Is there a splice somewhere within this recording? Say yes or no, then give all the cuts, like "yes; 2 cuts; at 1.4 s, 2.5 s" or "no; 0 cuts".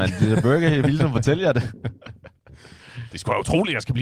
yes; 1 cut; at 2.4 s